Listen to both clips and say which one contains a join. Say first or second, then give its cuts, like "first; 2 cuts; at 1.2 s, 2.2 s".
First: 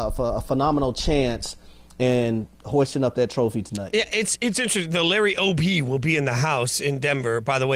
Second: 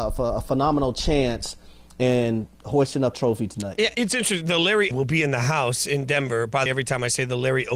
second; 4 cuts; at 3.1 s, 3.9 s, 4.9 s, 6.7 s